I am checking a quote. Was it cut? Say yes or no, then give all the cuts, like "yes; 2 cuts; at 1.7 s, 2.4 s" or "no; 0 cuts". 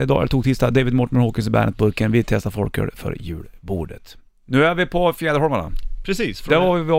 no; 0 cuts